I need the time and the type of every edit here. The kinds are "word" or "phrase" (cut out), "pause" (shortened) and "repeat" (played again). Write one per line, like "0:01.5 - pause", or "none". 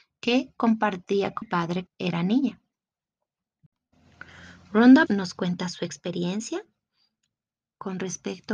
0:01.4 - word
0:01.9 - word
0:05.1 - word